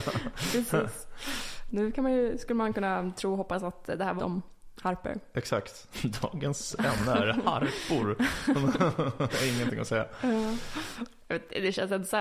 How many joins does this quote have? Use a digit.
2